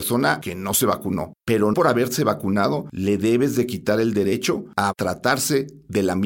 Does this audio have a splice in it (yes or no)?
yes